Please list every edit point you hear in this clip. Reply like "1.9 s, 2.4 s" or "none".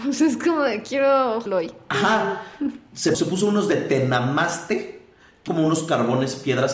1.5 s, 3.1 s, 5.5 s